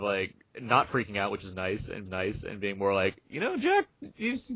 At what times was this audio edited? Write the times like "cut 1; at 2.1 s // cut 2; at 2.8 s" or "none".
cut 1; at 2.1 s